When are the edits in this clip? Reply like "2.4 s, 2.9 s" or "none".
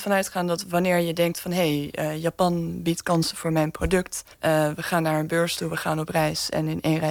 4.3 s